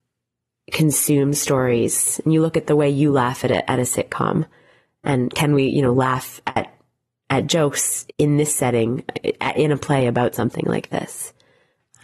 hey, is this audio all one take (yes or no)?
no